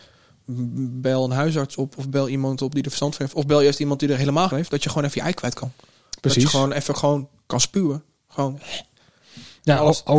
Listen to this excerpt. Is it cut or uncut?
cut